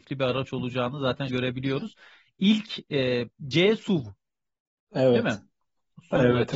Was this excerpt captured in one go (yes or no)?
no